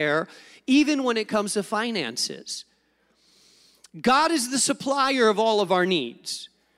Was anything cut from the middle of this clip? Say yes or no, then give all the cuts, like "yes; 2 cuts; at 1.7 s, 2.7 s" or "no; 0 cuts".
no; 0 cuts